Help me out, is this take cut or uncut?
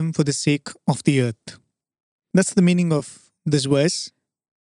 uncut